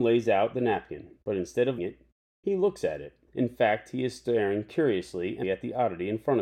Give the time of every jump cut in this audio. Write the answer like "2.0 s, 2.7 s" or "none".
1.2 s, 1.8 s, 3.3 s, 5.4 s